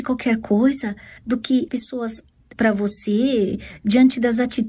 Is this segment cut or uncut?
cut